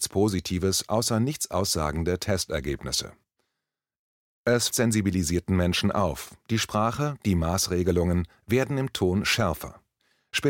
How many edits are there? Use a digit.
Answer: 1